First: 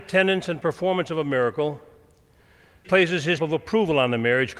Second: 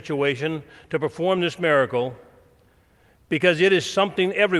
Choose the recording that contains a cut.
first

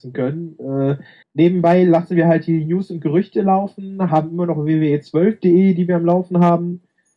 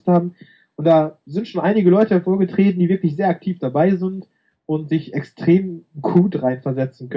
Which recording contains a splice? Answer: first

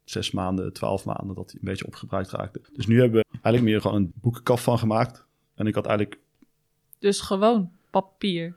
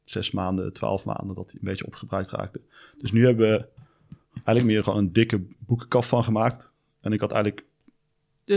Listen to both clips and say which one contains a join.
first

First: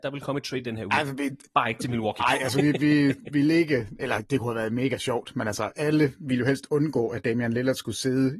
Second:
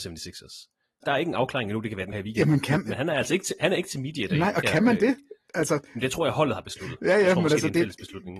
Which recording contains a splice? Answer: second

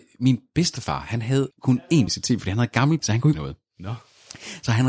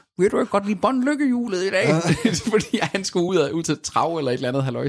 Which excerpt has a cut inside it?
first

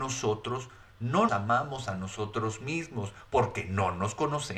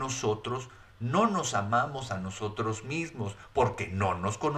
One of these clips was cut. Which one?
first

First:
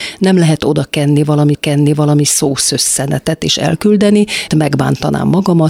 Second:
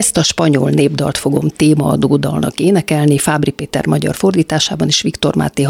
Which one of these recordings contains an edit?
first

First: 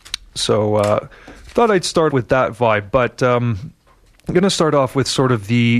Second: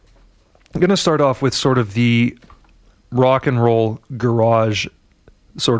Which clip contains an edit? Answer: first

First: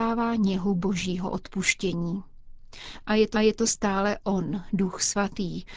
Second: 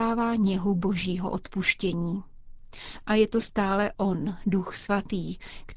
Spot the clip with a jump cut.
first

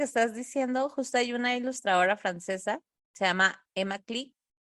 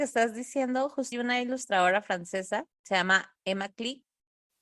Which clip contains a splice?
second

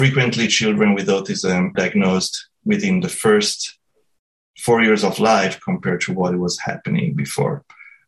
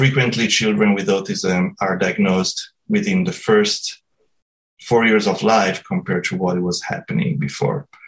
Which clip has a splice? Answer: first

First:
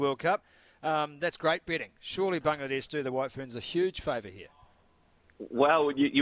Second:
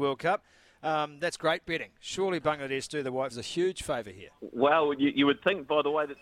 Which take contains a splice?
second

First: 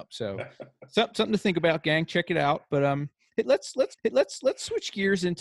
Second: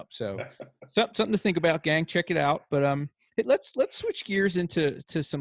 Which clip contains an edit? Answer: first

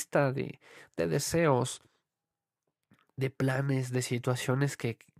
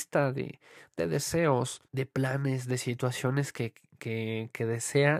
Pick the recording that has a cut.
second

